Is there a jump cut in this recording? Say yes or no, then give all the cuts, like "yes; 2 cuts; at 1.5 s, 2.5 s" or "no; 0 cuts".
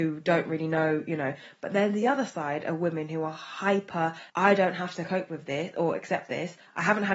no; 0 cuts